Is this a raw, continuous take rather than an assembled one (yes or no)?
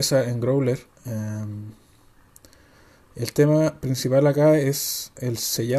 yes